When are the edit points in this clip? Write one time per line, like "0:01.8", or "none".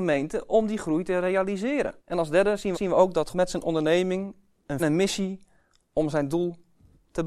0:02.0
0:02.7
0:03.3
0:04.8